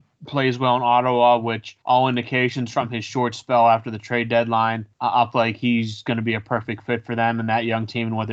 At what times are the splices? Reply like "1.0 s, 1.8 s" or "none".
1.8 s, 4.9 s, 5.3 s

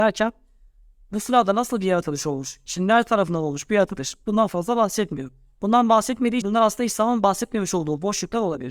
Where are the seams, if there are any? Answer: 6.4 s

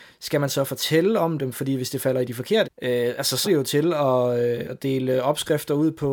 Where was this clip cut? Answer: 2.6 s, 3.4 s, 4.6 s

